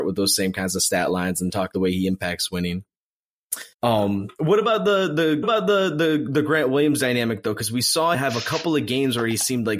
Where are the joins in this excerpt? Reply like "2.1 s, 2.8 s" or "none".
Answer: 1.7 s, 3.7 s, 5.4 s, 8.1 s